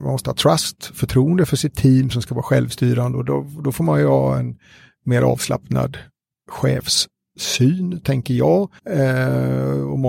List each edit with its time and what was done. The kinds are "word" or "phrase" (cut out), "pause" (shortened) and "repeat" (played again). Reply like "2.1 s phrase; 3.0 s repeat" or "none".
8.8 s pause